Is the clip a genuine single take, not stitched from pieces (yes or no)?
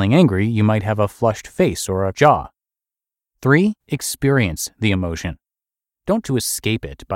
no